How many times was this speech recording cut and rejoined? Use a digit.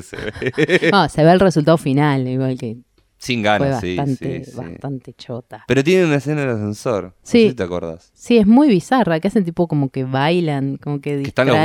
0